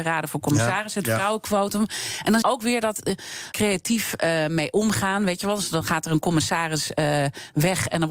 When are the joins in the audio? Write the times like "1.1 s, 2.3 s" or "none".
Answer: 2.4 s, 3.5 s

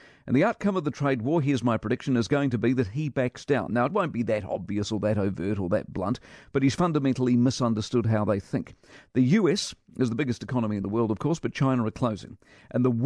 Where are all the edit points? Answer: none

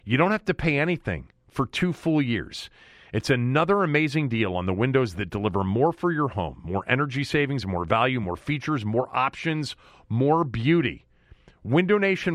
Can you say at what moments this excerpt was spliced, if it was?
none

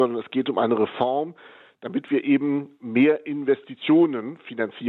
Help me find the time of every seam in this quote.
none

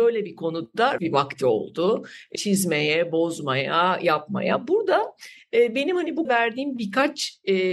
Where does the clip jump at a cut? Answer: 1.0 s, 2.4 s, 6.3 s

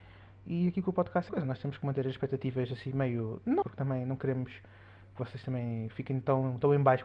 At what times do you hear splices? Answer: 1.3 s, 3.6 s

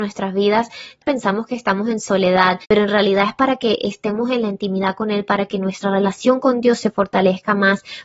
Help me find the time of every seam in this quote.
1.0 s

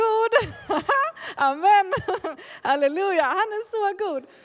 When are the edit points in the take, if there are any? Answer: none

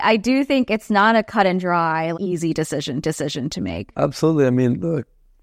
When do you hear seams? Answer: 2.1 s, 3.0 s, 3.9 s

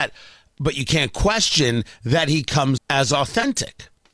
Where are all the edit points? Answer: 2.8 s

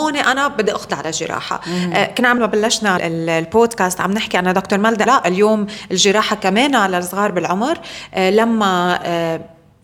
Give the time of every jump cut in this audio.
2.4 s, 3.0 s, 5.1 s

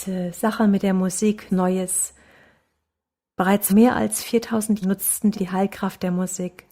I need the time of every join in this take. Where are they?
1.5 s, 3.7 s, 4.8 s, 5.3 s

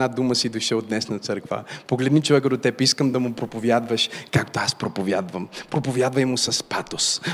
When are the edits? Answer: none

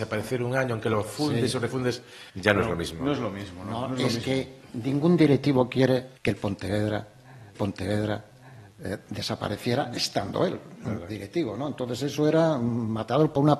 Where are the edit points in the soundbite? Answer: 2.3 s, 6.2 s, 7.5 s, 11.1 s

